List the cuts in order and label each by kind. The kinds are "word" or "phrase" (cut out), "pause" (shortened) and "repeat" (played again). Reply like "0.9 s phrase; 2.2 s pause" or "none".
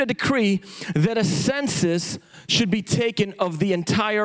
none